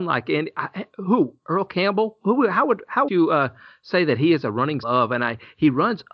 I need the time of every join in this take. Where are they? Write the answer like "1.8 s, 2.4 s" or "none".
3.1 s, 4.8 s